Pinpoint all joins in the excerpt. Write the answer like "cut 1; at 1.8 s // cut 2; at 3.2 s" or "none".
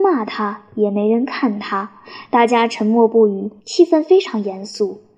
cut 1; at 3.6 s